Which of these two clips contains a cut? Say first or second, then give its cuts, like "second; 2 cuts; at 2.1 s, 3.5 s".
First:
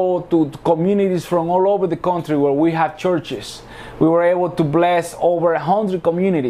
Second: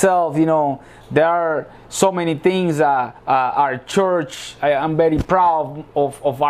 second; 1 cut; at 3.2 s